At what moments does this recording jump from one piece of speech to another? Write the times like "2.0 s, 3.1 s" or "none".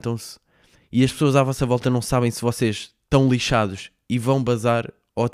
none